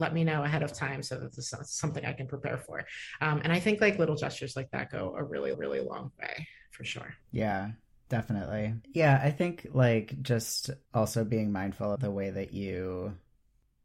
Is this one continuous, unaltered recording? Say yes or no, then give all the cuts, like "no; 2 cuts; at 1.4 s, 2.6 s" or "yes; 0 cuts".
no; 4 cuts; at 5.5 s, 8.8 s, 10.8 s, 12.0 s